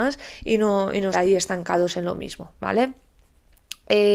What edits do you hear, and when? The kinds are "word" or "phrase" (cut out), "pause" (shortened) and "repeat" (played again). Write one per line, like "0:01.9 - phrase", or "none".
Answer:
0:01.1 - word